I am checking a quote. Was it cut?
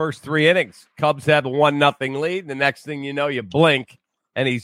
yes; 1 cut; at 0.9 s

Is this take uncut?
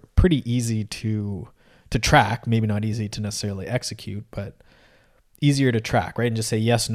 yes; 0 cuts

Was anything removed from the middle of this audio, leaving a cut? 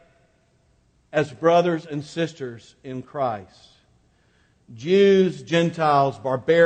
no; 0 cuts

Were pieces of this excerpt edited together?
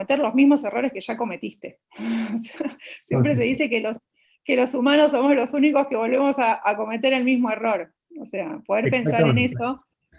no; 0 cuts

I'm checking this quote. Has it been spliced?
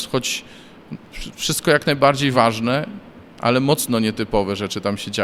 no; 0 cuts

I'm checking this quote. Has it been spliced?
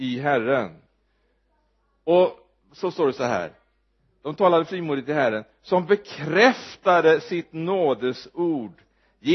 no; 0 cuts

